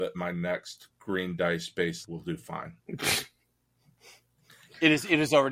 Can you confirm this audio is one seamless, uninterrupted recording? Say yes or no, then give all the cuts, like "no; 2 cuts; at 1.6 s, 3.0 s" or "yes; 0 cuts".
no; 3 cuts; at 0.9 s, 2.0 s, 2.8 s